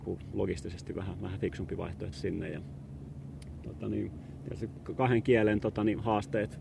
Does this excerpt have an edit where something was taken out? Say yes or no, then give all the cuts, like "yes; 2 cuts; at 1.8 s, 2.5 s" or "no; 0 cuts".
yes; 1 cut; at 2.1 s